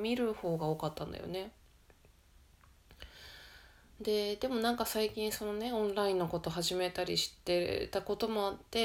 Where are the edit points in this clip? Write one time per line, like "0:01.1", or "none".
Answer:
none